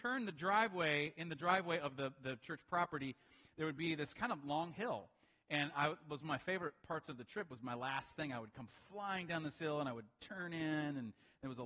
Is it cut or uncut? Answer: uncut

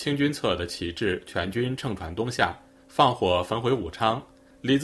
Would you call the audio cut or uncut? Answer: uncut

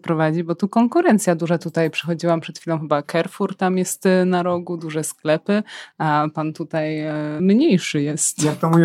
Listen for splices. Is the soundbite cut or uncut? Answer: cut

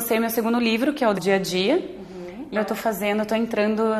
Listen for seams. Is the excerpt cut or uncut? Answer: cut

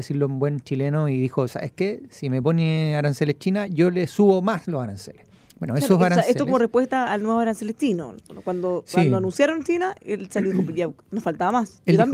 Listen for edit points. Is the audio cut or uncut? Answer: uncut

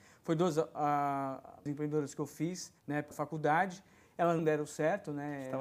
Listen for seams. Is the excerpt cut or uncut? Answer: cut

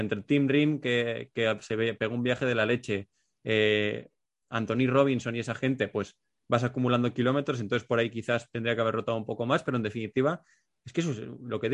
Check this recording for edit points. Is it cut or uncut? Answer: uncut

